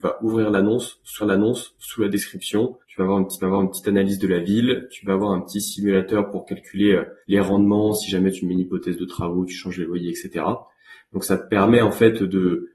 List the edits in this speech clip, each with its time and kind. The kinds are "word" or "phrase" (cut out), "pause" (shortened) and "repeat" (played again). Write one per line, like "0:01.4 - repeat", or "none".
0:01.2 - repeat
0:02.8 - pause
0:03.4 - repeat
0:07.2 - pause